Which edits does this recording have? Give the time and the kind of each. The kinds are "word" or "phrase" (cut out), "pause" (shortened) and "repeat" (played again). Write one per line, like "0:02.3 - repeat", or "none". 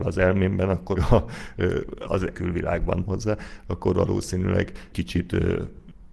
0:01.0 - word
0:02.3 - phrase
0:03.1 - word
0:04.9 - word